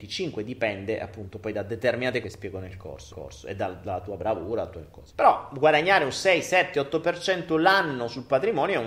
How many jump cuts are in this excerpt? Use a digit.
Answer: 3